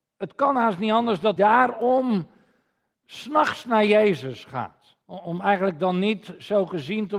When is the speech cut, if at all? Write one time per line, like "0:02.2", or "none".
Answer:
0:01.4
0:05.0